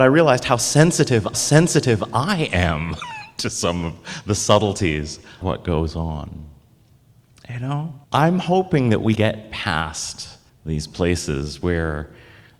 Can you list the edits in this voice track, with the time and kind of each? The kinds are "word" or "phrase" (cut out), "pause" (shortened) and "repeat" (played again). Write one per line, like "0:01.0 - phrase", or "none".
0:01.3 - repeat
0:05.4 - word
0:08.0 - pause
0:09.2 - word
0:10.5 - pause

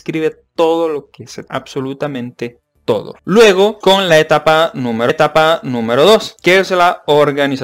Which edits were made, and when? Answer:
0:01.5 - word
0:03.8 - word
0:05.1 - repeat

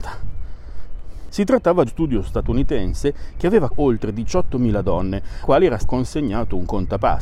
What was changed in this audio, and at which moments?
0:01.9 - word
0:03.7 - word
0:05.4 - word
0:05.8 - word

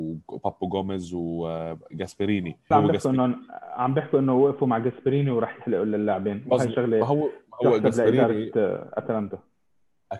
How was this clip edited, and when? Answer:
0:02.7 - word

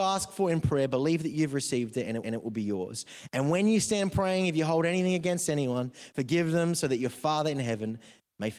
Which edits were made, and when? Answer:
0:02.2 - repeat

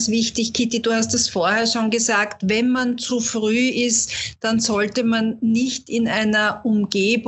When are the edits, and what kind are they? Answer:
none

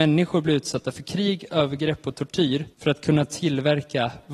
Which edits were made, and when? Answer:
0:02.7 - pause

